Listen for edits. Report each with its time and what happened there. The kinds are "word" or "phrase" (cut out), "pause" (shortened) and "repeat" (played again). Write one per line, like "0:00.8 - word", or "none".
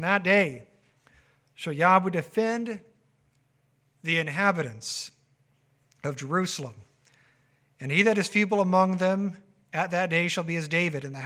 none